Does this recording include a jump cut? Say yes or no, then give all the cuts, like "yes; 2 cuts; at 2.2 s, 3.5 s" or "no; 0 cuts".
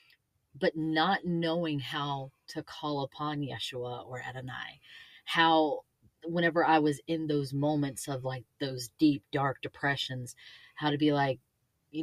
no; 0 cuts